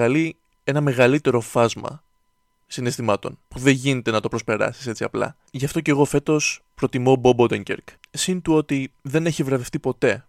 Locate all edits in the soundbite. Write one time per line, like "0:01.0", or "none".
0:03.4
0:05.5
0:08.0
0:09.0